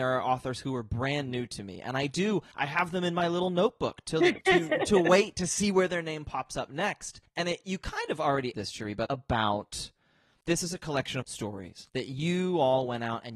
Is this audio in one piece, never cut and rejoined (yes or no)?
no